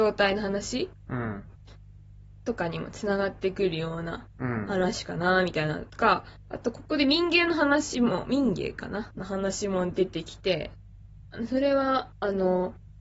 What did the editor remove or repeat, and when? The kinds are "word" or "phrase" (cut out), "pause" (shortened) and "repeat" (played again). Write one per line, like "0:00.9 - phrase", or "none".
0:09.1 - phrase